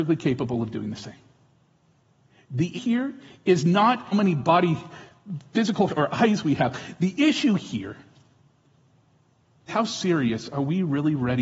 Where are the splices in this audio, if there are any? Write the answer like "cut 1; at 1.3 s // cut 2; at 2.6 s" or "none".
cut 1; at 2.7 s // cut 2; at 4.1 s // cut 3; at 5.9 s // cut 4; at 9.7 s